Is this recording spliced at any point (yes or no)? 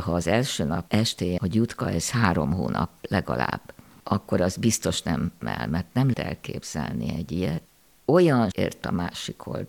yes